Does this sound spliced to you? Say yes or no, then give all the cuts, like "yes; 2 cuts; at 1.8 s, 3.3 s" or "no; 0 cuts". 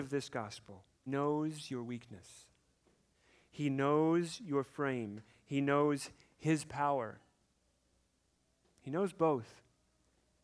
yes; 1 cut; at 1.1 s